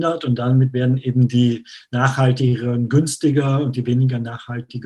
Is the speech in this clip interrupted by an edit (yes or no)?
no